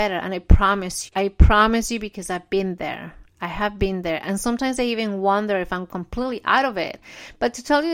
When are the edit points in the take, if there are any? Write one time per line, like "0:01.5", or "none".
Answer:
0:01.1